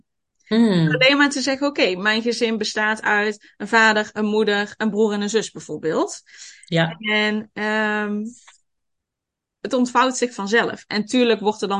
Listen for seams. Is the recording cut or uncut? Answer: uncut